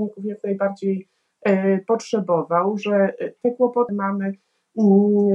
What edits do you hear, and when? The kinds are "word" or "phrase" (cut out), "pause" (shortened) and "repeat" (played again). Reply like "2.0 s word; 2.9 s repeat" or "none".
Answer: 3.9 s phrase